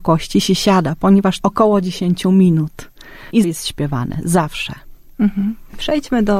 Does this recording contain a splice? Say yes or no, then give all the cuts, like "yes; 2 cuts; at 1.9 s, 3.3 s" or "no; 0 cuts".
yes; 2 cuts; at 1.4 s, 3.4 s